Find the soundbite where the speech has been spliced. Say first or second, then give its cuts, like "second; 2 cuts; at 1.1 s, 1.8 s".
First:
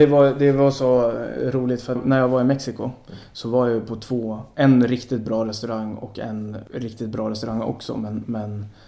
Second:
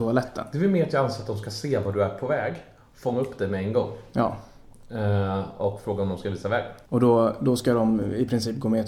first; 1 cut; at 2.0 s